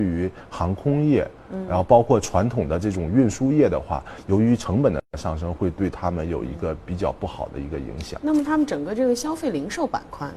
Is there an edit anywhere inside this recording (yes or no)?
no